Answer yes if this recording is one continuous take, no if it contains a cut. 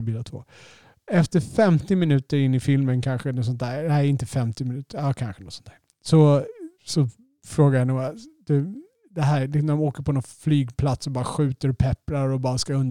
yes